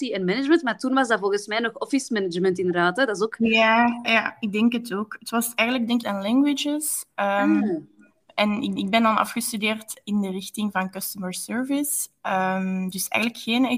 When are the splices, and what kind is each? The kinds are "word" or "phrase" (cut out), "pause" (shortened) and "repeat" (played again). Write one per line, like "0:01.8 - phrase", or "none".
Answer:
0:04.0 - word
0:06.0 - phrase
0:08.8 - repeat